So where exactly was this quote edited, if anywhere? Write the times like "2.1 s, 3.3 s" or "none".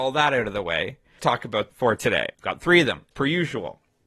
1.2 s, 1.7 s, 2.3 s, 3.1 s

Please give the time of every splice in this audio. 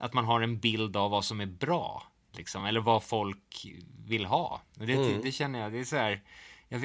none

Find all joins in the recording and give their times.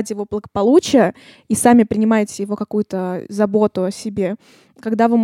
none

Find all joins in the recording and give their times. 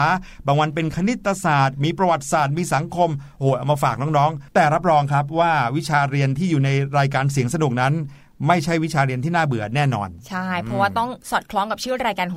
4.5 s, 11.2 s

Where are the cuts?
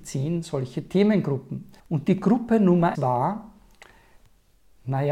1.8 s, 2.9 s

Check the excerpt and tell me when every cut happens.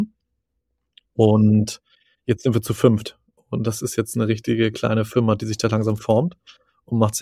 none

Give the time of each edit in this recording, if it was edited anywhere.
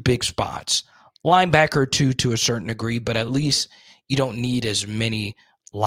none

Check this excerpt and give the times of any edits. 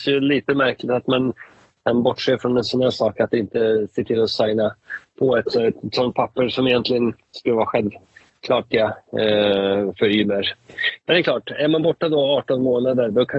8.7 s

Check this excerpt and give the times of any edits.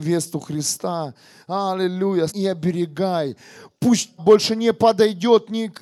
2.3 s, 4.2 s

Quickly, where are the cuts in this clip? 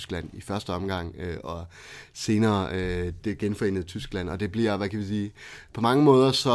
3.2 s

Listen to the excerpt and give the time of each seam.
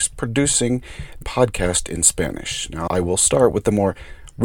1.2 s, 2.9 s

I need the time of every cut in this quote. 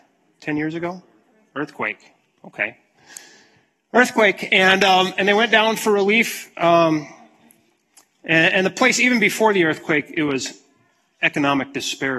none

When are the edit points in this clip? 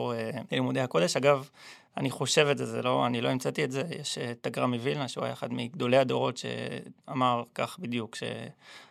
none

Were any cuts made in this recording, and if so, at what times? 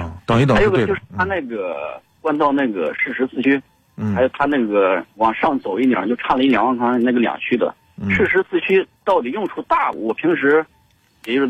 9.0 s

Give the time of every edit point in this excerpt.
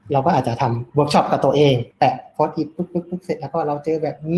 1.9 s

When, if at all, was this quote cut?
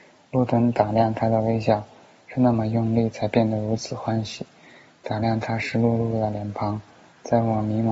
none

